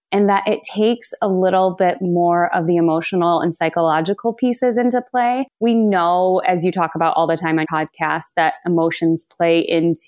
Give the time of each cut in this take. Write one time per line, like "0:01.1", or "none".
0:05.5
0:07.6